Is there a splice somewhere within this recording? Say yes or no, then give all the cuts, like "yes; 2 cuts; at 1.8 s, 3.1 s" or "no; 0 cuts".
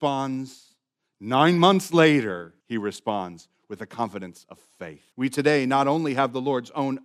yes; 2 cuts; at 2.6 s, 5.1 s